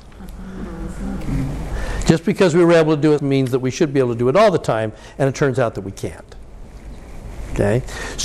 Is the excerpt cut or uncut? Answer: cut